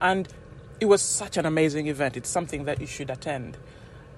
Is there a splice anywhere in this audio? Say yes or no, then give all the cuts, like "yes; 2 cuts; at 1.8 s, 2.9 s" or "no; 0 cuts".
no; 0 cuts